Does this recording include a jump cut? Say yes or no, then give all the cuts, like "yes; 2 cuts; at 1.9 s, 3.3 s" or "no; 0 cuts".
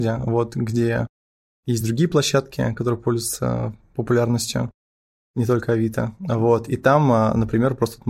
no; 0 cuts